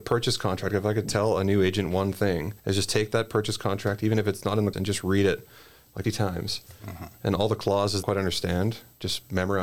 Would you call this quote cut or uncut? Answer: cut